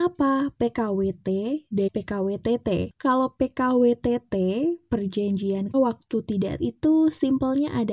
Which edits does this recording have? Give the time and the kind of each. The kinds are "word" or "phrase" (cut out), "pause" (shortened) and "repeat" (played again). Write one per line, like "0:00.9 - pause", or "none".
0:01.9 - word
0:05.7 - word
0:06.6 - word

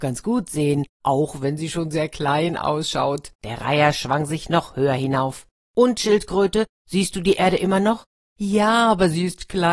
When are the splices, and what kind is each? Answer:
0:03.4 - pause

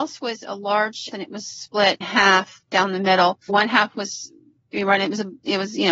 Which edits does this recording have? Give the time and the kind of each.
0:01.1 - word
0:02.0 - word
0:03.5 - word

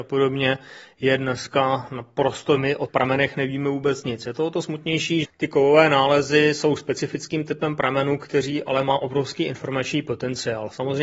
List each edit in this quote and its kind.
0:02.6 - phrase
0:02.9 - word
0:05.2 - word

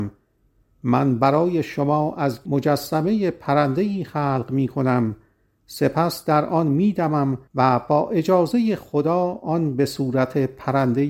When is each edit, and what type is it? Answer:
0:02.5 - word
0:07.5 - pause

